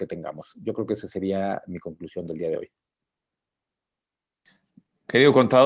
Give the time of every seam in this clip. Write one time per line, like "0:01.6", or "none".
none